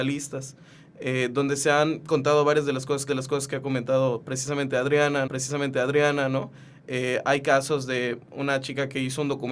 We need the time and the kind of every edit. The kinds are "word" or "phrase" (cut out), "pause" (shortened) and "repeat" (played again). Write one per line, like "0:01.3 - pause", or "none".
0:03.1 - repeat
0:05.3 - repeat